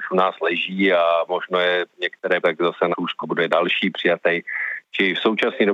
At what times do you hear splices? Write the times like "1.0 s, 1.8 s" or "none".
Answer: 1.3 s, 2.4 s, 2.9 s, 3.2 s